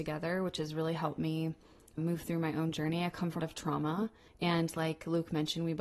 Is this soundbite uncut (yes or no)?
no